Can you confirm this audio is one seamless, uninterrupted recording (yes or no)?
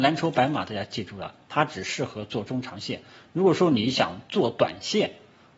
yes